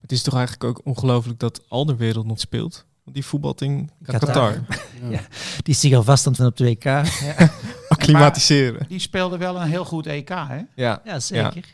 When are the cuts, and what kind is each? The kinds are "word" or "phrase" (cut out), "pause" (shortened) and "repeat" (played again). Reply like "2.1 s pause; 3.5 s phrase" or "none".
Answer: 2.4 s word; 6.4 s word